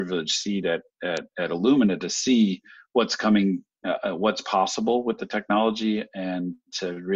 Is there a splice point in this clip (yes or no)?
no